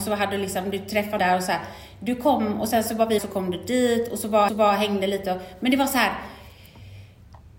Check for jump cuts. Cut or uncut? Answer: cut